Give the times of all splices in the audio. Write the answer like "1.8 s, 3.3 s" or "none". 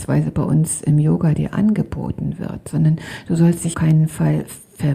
3.7 s